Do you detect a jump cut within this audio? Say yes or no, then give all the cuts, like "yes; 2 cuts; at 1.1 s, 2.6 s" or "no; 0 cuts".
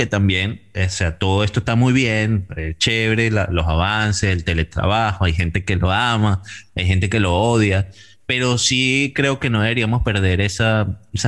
no; 0 cuts